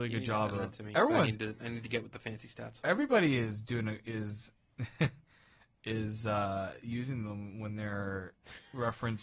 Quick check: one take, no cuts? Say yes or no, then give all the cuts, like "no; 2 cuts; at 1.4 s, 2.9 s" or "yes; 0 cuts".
yes; 0 cuts